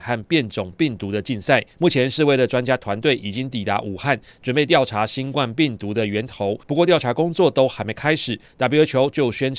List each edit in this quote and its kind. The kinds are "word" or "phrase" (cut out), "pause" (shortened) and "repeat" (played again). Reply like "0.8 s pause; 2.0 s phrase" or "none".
1.7 s pause; 6.6 s pause